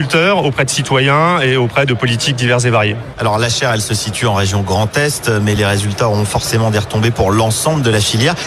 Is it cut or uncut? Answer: uncut